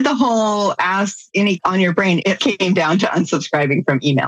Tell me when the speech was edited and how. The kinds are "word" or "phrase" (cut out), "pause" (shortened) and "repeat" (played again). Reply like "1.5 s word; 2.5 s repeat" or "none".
1.6 s word; 2.4 s word